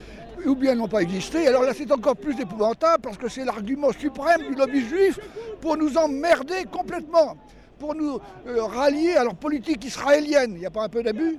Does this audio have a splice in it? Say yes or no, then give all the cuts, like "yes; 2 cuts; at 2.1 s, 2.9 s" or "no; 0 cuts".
no; 0 cuts